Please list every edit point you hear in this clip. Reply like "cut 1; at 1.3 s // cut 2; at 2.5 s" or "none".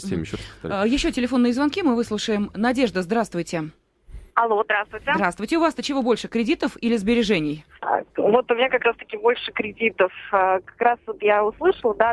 cut 1; at 4.3 s // cut 2; at 8.1 s

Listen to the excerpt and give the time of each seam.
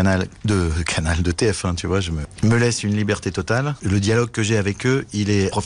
none

